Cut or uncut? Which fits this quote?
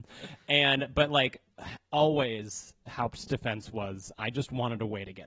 uncut